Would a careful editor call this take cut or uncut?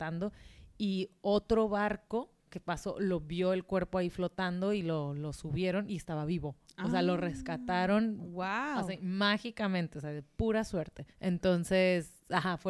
cut